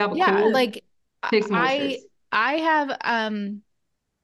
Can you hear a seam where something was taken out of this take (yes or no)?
no